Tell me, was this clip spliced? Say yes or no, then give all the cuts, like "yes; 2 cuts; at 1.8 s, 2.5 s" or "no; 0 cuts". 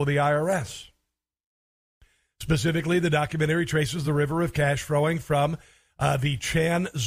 no; 0 cuts